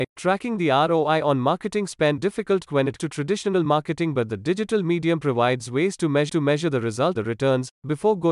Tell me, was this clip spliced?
yes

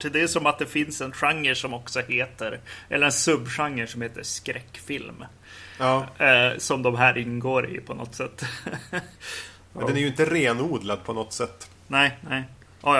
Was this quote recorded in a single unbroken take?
no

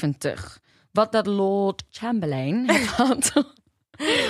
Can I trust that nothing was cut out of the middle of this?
no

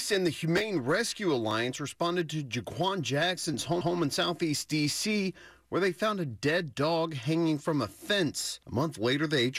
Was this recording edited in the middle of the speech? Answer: yes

